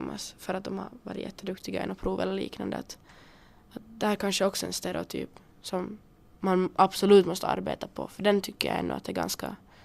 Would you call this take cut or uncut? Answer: uncut